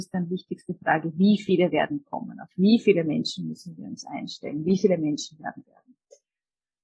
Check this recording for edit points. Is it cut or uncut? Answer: cut